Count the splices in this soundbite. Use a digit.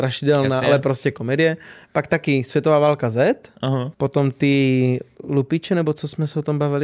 1